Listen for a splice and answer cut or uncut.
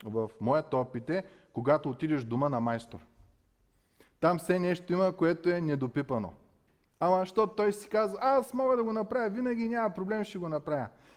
uncut